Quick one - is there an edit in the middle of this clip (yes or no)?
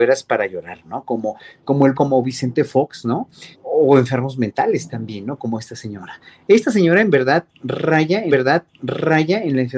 yes